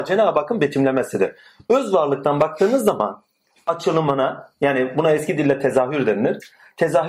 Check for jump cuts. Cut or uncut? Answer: cut